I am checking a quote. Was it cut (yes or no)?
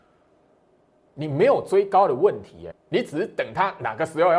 yes